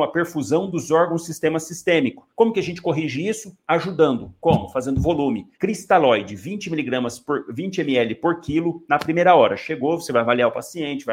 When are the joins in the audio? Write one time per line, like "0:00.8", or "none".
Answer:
0:02.3
0:05.5